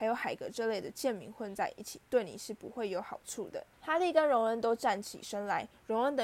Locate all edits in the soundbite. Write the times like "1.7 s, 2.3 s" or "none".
3.7 s